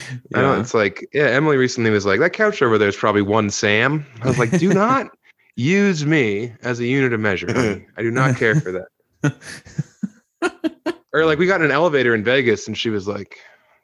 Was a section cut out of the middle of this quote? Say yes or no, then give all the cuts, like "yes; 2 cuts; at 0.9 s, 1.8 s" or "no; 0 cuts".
no; 0 cuts